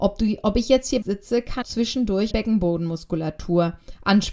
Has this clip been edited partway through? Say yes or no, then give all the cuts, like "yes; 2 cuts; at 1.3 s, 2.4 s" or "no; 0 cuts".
yes; 3 cuts; at 1.0 s, 1.6 s, 2.3 s